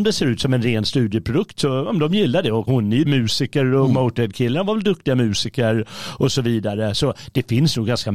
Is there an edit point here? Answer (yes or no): yes